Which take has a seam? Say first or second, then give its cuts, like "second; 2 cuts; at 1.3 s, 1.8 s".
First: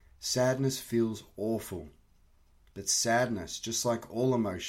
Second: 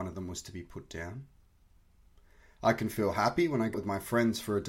second; 1 cut; at 3.7 s